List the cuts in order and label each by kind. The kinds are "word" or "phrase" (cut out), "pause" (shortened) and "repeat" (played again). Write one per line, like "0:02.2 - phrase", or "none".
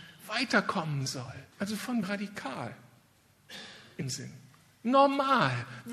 0:01.5 - pause
0:02.0 - word
0:04.0 - word